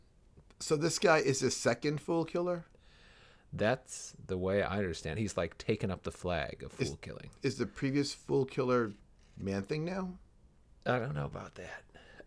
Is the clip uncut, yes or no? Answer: yes